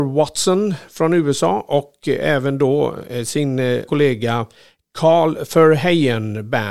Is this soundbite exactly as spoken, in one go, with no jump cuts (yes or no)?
no